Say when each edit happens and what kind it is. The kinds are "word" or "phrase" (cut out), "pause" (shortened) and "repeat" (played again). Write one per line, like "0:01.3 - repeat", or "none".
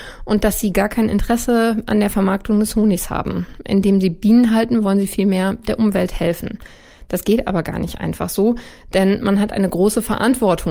none